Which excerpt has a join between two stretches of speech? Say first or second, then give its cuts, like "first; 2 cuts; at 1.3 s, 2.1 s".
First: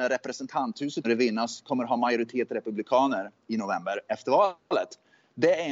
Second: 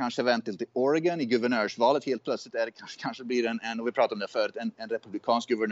first; 1 cut; at 1.0 s